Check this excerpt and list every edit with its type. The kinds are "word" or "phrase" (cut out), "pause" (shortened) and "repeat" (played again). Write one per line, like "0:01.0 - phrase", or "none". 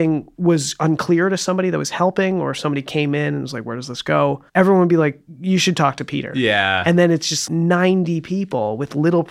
0:04.5 - pause